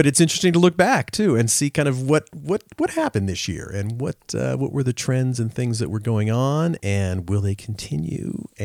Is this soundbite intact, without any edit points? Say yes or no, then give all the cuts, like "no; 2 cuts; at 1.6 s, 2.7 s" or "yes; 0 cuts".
yes; 0 cuts